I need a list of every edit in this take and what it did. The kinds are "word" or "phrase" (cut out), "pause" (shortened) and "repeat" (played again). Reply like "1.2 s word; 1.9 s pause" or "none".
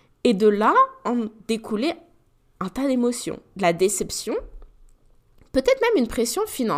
none

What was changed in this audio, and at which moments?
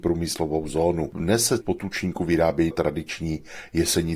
1.6 s phrase; 2.7 s word

